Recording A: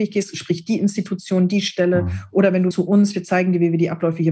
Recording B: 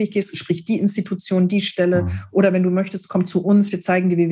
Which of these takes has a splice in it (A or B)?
A